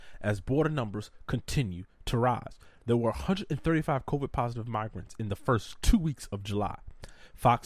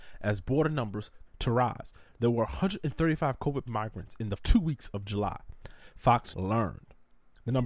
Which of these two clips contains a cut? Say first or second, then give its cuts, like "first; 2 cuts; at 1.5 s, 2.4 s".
second; 4 cuts; at 1.3 s, 3.7 s, 4.4 s, 6.3 s